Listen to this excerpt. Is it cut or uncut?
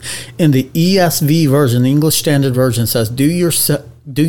uncut